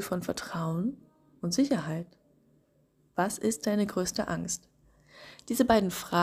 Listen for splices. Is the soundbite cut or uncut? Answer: uncut